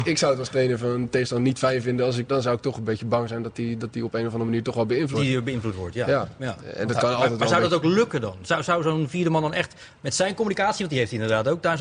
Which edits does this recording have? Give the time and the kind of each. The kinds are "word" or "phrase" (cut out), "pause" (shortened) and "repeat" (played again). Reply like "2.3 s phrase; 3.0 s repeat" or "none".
2.3 s word; 5.1 s word